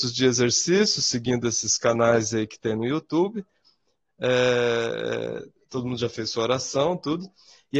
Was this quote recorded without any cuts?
yes; 0 cuts

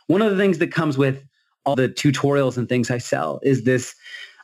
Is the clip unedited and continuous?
no; 1 cut; at 1.7 s

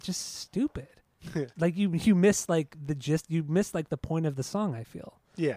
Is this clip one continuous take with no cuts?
no; 1 cut; at 1.5 s

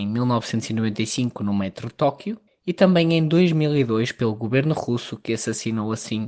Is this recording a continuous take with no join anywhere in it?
no; 1 cut; at 2.5 s

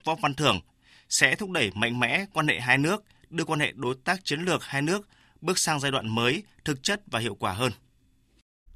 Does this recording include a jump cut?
no; 0 cuts

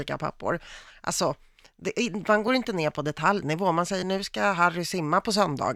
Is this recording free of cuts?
yes; 0 cuts

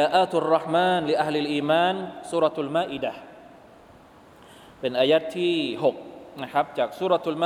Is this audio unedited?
yes; 0 cuts

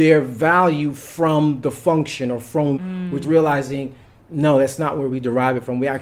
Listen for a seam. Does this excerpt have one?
yes; 3 cuts; at 2.8 s, 3.2 s, 4.0 s

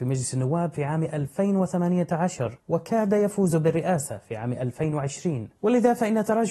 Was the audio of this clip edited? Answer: no; 0 cuts

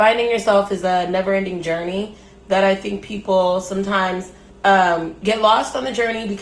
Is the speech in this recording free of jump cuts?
no; 1 cut; at 4.5 s

